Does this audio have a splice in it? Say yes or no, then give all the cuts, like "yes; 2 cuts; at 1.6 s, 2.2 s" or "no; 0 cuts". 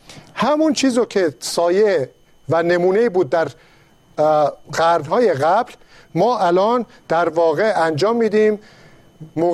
no; 0 cuts